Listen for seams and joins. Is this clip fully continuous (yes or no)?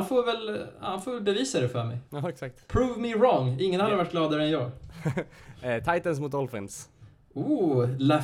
no